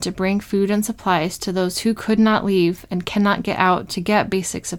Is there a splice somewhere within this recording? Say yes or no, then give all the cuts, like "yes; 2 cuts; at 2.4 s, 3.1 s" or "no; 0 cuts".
no; 0 cuts